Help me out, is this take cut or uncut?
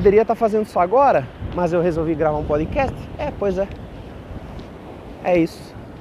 uncut